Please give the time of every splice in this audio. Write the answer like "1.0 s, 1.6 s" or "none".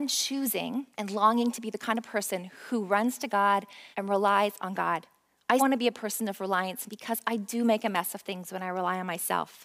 0.9 s, 3.3 s, 3.9 s, 5.6 s, 6.9 s

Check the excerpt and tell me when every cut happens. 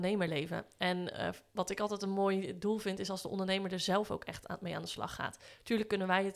none

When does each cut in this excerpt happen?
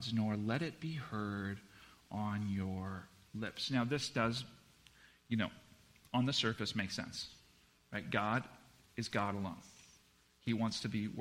none

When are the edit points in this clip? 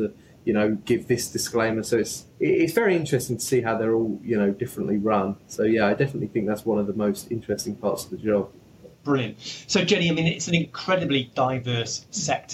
2.3 s, 8.9 s

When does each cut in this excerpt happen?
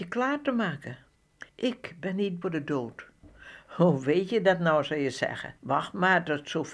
1.5 s, 2.4 s, 5.6 s

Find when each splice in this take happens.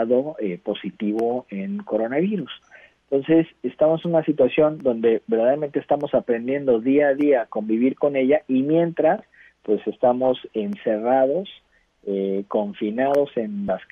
none

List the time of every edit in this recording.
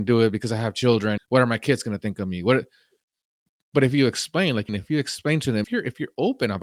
1.2 s, 4.7 s, 5.6 s

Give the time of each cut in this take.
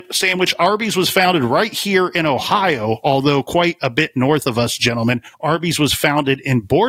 5.3 s

